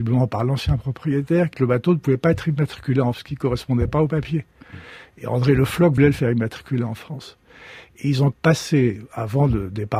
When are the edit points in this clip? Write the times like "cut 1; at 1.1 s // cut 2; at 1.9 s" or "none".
cut 1; at 1.5 s // cut 2; at 3.1 s // cut 3; at 6.0 s // cut 4; at 8.3 s